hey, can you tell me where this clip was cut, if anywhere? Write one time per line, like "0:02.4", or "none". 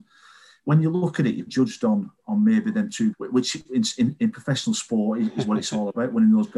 0:01.5
0:03.1

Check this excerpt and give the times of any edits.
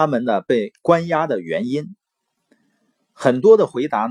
none

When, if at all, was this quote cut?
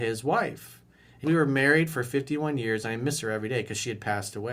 0:01.2

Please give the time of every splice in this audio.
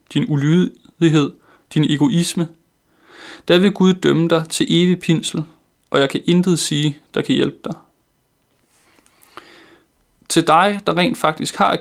none

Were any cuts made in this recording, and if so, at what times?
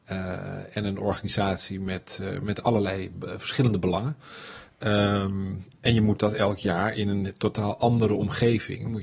none

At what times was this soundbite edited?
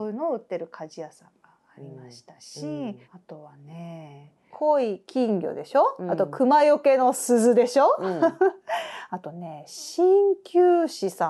0:03.0

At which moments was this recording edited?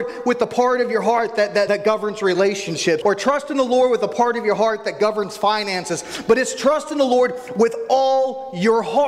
0:01.7
0:03.0

